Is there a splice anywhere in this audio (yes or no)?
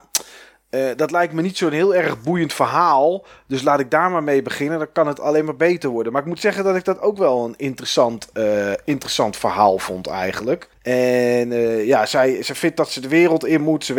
yes